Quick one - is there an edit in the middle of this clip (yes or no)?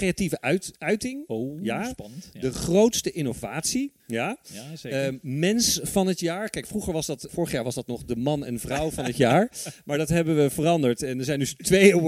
yes